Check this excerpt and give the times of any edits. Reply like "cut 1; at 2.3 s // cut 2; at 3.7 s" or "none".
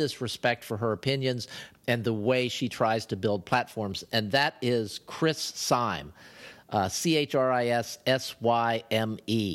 none